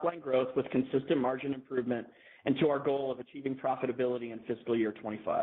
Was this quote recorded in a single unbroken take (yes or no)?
yes